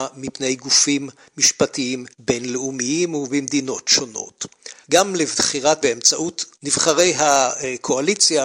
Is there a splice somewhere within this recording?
yes; 4 cuts; at 2.1 s, 4.8 s, 5.8 s, 6.5 s

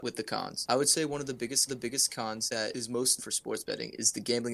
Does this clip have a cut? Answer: yes; 2 cuts; at 1.7 s, 3.2 s

